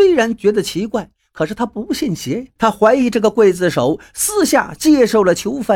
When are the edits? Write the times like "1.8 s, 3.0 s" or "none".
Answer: 2.6 s